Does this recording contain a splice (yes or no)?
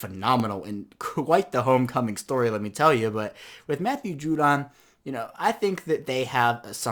no